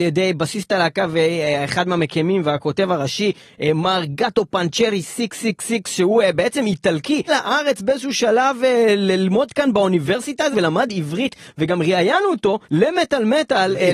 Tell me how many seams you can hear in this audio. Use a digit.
3